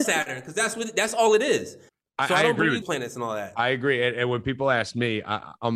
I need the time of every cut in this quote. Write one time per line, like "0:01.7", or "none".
0:01.9
0:02.8